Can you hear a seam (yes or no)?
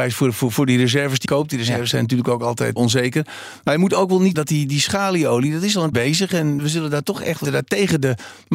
yes